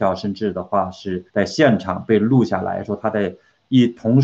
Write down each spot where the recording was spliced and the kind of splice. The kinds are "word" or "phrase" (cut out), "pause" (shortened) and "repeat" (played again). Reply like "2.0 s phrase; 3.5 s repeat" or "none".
1.3 s pause